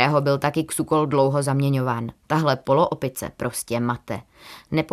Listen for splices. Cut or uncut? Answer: uncut